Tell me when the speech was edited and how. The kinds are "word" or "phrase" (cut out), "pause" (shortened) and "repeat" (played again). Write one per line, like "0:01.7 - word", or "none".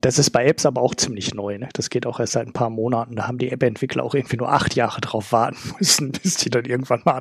none